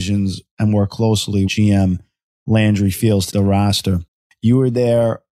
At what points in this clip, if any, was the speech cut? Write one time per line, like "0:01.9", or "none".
0:01.5
0:03.3

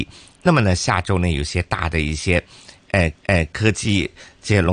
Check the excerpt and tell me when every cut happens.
0:03.1

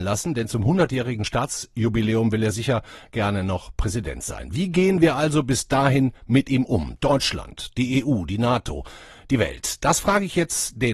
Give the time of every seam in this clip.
none

